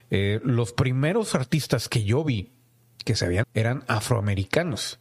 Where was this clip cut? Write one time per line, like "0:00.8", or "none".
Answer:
0:03.4